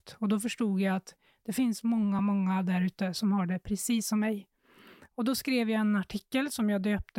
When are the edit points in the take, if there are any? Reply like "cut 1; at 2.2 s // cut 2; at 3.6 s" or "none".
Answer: none